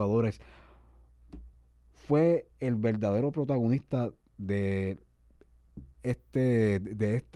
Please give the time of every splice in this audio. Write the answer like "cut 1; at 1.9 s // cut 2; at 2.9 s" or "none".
none